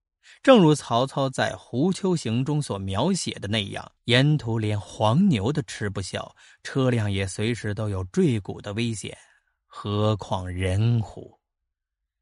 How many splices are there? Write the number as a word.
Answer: one